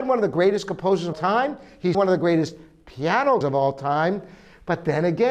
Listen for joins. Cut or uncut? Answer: cut